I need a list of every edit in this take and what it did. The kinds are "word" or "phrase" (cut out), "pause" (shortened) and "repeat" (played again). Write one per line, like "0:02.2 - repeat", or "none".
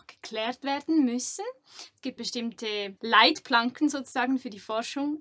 0:02.2 - word
0:03.0 - pause